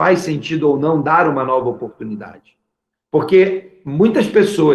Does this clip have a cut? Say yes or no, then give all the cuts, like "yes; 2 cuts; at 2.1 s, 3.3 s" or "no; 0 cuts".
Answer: no; 0 cuts